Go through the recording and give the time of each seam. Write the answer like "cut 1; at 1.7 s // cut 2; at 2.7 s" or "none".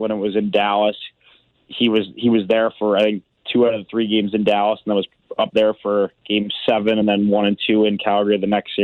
none